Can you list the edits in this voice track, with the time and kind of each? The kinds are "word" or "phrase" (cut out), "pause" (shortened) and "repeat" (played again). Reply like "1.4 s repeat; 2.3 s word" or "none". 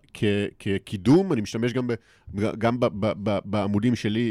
none

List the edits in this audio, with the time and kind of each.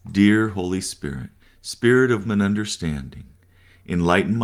1.4 s pause; 2.2 s word

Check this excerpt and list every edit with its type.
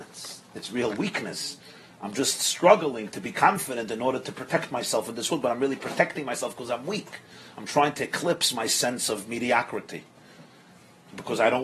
none

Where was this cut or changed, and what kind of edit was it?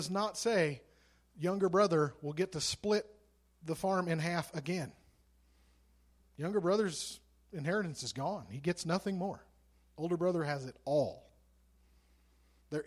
none

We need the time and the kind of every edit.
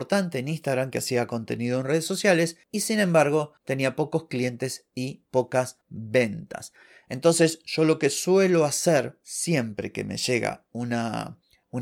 none

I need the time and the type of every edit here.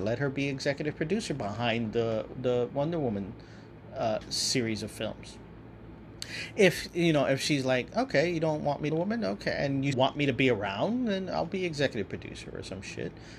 8.9 s phrase; 9.9 s word

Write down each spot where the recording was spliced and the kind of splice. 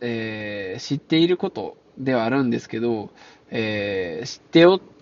none

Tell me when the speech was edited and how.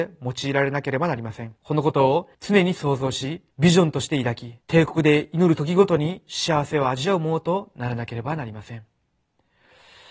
1.6 s pause; 2.3 s pause; 3.5 s pause; 4.6 s pause

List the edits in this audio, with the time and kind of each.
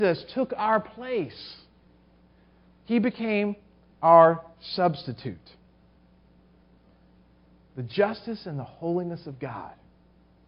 none

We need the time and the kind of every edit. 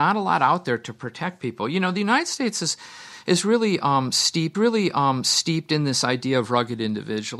4.5 s repeat

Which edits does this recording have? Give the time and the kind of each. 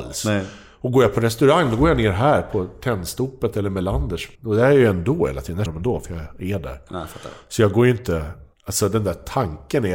4.3 s pause; 5.7 s word; 8.5 s pause

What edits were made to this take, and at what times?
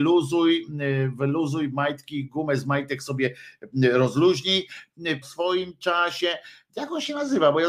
5.2 s phrase

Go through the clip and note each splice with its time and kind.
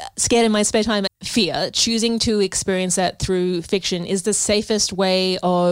1.1 s phrase

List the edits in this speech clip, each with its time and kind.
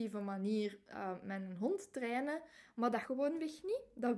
3.0 s word

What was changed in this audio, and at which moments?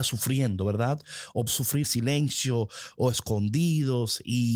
1.5 s word; 1.8 s word

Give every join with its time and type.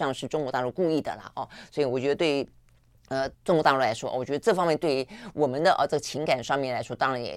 3.3 s pause

